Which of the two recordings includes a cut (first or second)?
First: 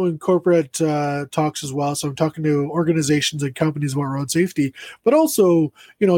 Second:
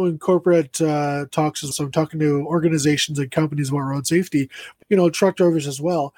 second